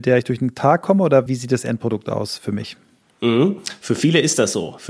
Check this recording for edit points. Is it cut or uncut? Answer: cut